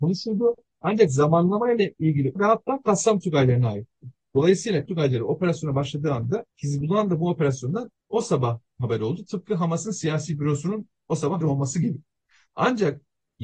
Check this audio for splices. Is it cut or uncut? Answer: cut